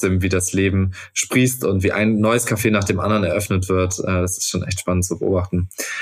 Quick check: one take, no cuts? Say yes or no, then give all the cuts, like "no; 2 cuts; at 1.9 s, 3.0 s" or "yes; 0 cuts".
yes; 0 cuts